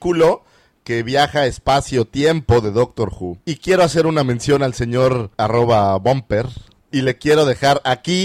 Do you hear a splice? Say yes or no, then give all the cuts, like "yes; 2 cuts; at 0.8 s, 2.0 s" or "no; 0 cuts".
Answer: yes; 3 cuts; at 3.4 s, 5.3 s, 6.8 s